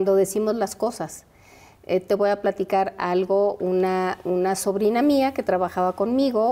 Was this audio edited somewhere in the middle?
no; 0 cuts

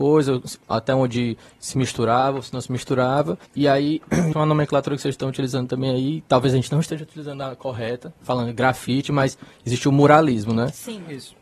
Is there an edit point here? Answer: yes; 2 cuts; at 3.5 s, 4.3 s

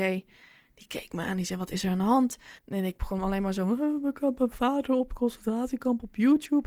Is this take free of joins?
no; 1 cut; at 2.6 s

